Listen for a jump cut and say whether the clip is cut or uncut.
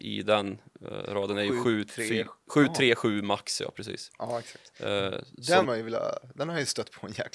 cut